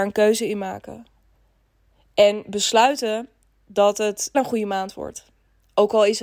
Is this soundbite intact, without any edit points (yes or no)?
no